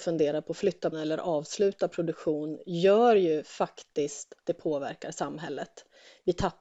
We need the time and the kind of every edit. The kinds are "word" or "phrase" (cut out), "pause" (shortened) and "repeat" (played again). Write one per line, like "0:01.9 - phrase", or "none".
0:00.9 - word
0:04.4 - word